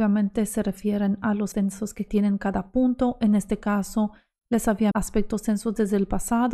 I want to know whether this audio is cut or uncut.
cut